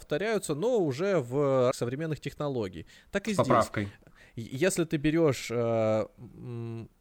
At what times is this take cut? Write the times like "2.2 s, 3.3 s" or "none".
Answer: 1.7 s